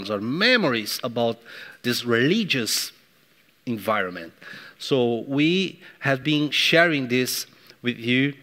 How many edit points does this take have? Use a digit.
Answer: 0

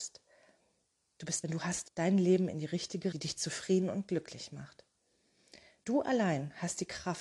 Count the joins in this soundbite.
3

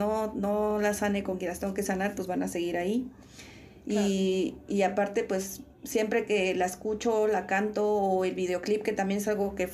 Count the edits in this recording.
1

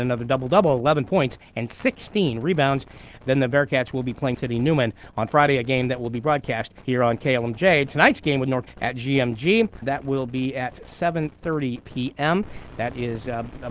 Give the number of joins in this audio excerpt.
4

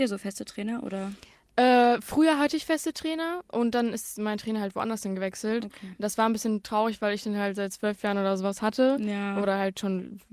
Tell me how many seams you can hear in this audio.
0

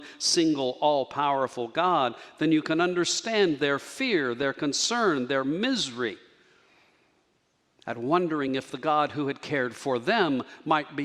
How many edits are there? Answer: 0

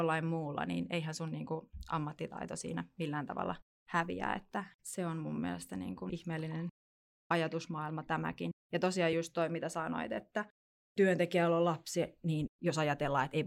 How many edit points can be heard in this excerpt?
0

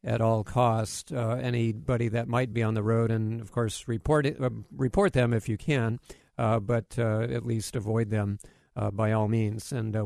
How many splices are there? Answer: 0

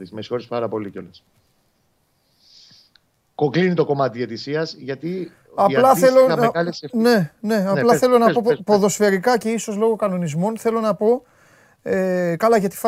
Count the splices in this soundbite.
0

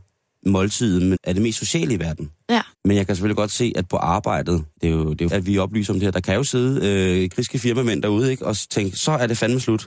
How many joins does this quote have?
4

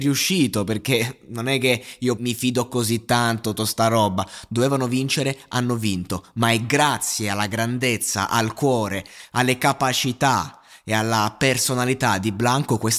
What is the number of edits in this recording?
2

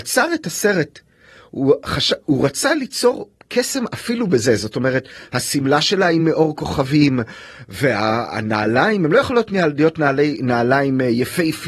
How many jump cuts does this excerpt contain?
0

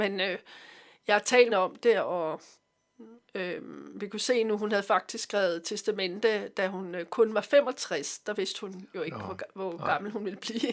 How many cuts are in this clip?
1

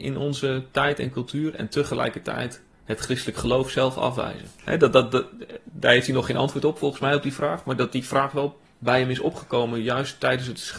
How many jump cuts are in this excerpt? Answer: 1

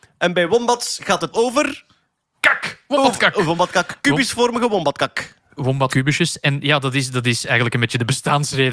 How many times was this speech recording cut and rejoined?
2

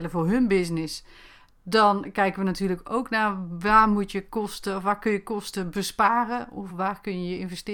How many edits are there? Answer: 0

